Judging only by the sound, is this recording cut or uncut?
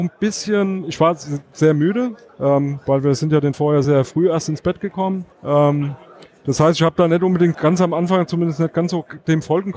cut